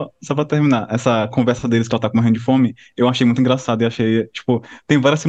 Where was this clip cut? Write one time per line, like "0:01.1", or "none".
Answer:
none